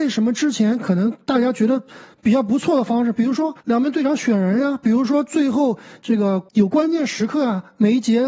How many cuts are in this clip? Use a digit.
2